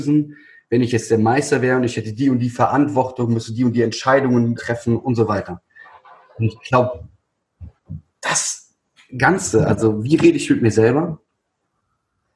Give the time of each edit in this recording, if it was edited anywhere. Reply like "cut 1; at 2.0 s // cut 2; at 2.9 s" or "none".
cut 1; at 4.6 s // cut 2; at 8.1 s